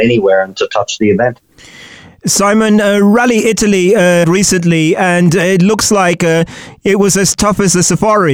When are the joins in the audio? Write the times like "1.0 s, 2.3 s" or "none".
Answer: 4.2 s

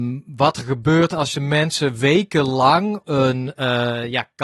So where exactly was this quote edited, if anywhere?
3.0 s

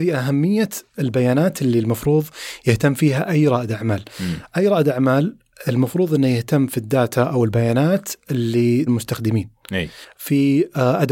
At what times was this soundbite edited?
8.9 s

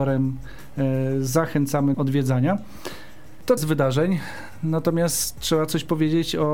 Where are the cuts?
1.9 s, 3.6 s

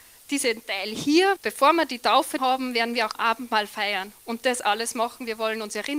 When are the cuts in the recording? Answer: 1.4 s, 2.4 s, 3.1 s

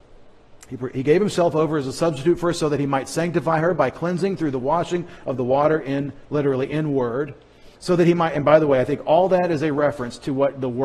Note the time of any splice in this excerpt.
7.7 s

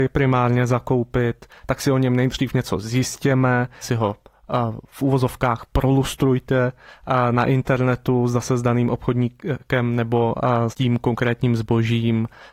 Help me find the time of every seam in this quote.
3.8 s, 10.7 s

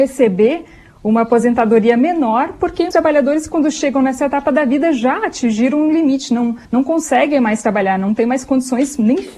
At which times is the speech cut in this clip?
2.9 s, 6.6 s

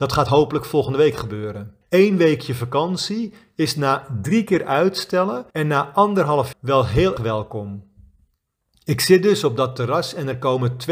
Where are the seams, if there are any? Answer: 1.8 s, 5.5 s, 6.5 s, 7.2 s

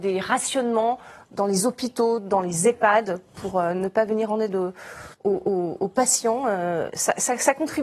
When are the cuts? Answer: 5.1 s

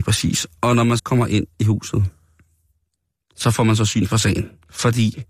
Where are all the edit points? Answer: 1.0 s

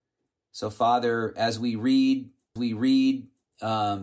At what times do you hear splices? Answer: 2.6 s

